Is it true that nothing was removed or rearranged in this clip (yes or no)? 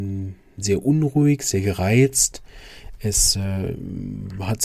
yes